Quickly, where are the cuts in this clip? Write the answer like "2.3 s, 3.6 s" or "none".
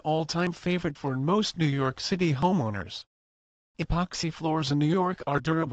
none